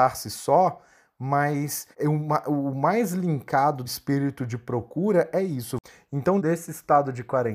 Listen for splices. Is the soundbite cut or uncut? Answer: cut